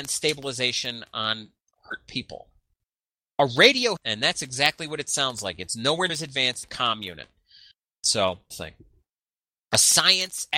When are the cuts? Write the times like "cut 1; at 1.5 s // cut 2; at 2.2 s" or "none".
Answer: cut 1; at 4.0 s // cut 2; at 6.1 s // cut 3; at 6.6 s // cut 4; at 8.5 s